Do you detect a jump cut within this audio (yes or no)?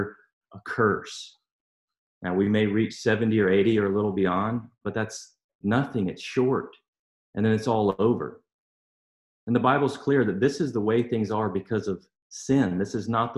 no